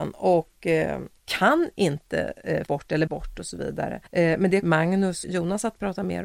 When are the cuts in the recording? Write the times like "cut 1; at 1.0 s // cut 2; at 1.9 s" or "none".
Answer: cut 1; at 1.2 s // cut 2; at 2.7 s // cut 3; at 3.1 s // cut 4; at 4.1 s // cut 5; at 4.6 s // cut 6; at 5.2 s